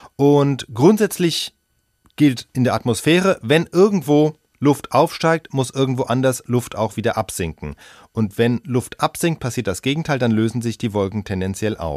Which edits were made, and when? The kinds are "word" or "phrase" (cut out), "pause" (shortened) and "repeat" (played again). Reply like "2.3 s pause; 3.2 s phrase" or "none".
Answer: none